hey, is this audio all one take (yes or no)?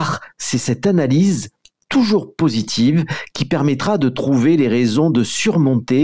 yes